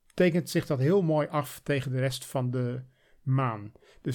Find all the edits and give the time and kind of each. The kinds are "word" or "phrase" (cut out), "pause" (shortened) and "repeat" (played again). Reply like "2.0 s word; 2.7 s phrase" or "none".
none

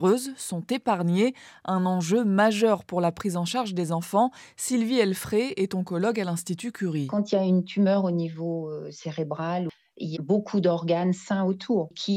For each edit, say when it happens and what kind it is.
10.1 s word

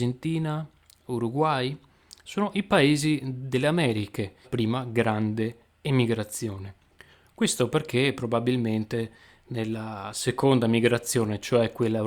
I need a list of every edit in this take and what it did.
4.4 s phrase

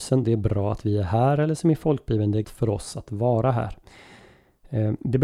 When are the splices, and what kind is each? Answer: 2.4 s word

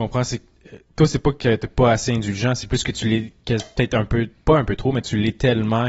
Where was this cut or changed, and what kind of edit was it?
none

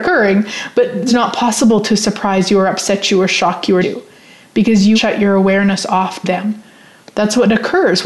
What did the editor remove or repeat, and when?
1.1 s word; 3.8 s word; 4.9 s word; 6.2 s word

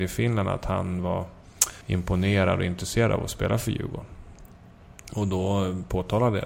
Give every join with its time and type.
1.8 s pause

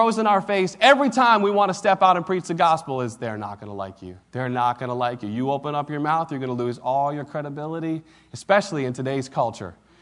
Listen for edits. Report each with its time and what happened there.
4.2 s pause

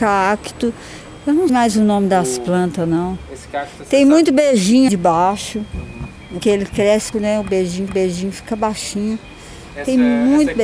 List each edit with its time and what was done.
1.5 s word; 4.9 s word; 6.4 s word; 7.1 s word; 7.9 s repeat

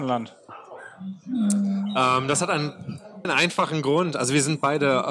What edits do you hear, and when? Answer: 3.2 s word

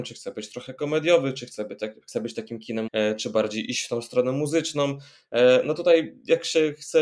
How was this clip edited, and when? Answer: 2.9 s word

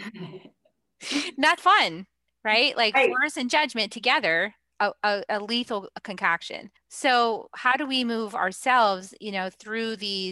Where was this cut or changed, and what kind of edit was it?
1.6 s word; 6.8 s pause

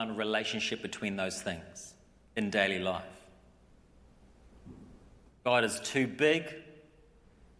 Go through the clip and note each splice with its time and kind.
none

